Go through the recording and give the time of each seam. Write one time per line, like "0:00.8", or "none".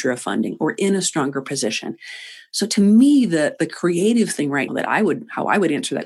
0:04.7